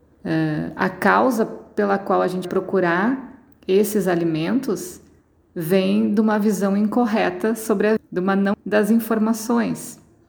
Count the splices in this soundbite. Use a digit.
3